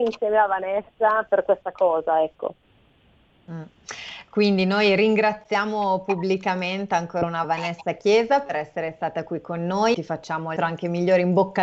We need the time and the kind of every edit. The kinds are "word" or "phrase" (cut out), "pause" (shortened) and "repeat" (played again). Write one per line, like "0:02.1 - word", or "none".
0:01.3 - word
0:07.4 - word
0:09.9 - word
0:10.6 - word